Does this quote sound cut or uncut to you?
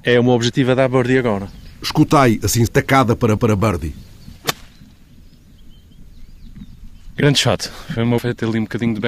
cut